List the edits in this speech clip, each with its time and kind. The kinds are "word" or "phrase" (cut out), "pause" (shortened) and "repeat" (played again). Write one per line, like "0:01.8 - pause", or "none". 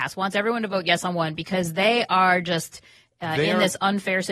none